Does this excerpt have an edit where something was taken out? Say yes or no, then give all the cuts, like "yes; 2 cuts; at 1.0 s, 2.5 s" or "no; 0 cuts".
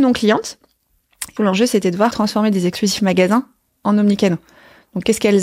yes; 2 cuts; at 1.4 s, 2.1 s